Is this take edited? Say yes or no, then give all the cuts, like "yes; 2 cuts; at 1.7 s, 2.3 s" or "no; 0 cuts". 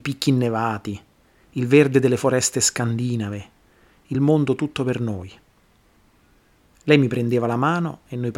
no; 0 cuts